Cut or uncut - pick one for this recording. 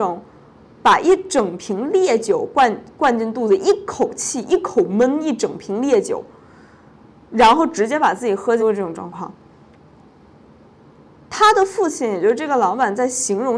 cut